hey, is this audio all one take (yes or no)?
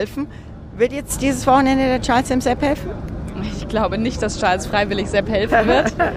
yes